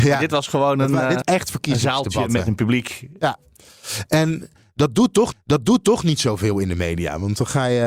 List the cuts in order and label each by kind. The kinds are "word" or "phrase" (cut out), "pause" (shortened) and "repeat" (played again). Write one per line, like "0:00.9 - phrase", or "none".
0:01.2 - word
0:05.3 - repeat